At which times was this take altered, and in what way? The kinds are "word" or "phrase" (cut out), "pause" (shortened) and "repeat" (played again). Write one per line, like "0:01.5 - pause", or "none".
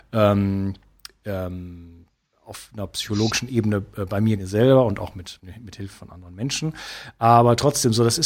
0:04.4 - phrase
0:05.4 - word